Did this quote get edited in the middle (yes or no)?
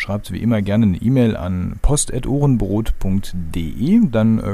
no